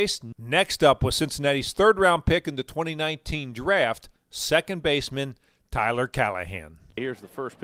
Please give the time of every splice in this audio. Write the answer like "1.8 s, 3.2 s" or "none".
none